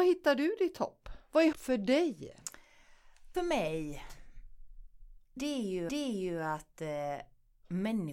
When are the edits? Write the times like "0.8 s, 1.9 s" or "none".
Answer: 1.5 s, 3.3 s, 5.4 s, 5.9 s